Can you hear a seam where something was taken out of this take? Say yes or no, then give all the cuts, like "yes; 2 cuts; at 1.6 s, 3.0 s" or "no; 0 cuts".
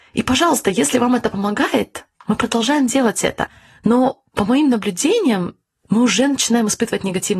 no; 0 cuts